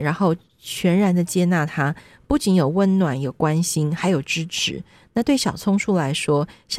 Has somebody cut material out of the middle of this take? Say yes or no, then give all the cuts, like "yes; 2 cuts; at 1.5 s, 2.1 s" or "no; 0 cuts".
no; 0 cuts